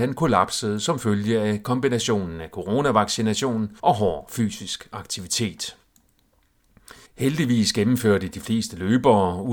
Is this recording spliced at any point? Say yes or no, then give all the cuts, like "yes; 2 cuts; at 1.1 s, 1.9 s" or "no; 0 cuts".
yes; 2 cuts; at 3.8 s, 7.1 s